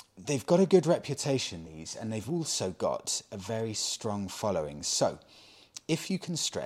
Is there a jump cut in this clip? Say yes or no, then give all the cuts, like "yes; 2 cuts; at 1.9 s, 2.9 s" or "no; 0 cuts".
no; 0 cuts